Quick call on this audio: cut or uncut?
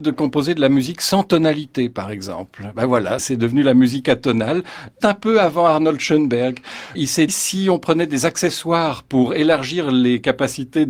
cut